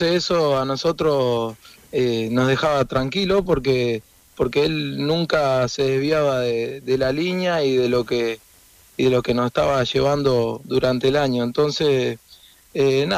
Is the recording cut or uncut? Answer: uncut